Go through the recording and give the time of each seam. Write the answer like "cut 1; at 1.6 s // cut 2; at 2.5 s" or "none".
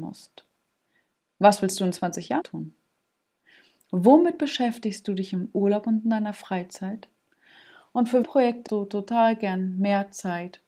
cut 1; at 2.4 s // cut 2; at 8.2 s // cut 3; at 8.7 s